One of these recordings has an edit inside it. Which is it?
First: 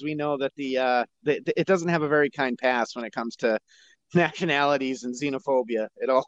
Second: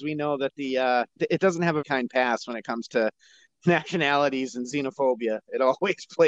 second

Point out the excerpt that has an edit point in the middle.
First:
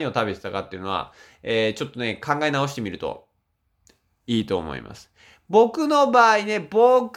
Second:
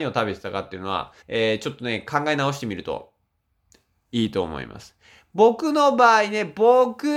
second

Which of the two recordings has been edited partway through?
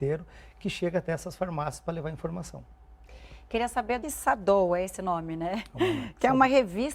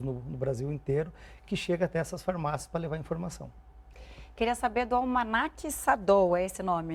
first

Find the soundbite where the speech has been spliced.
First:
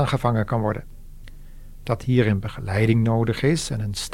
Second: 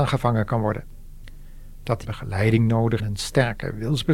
second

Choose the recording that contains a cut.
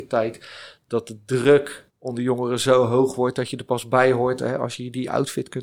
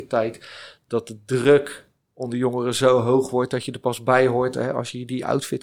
first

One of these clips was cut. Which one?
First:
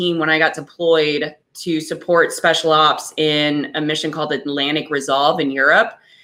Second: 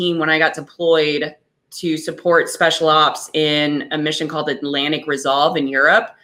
first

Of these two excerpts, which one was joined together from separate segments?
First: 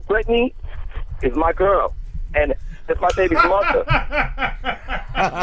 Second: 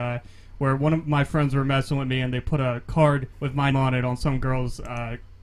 second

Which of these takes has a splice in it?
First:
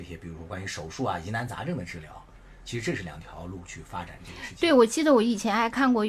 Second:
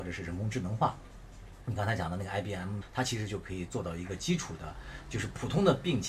second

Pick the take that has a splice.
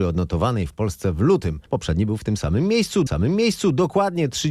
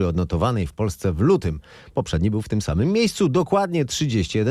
first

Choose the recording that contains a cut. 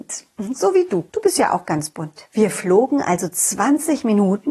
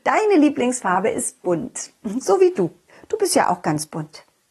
first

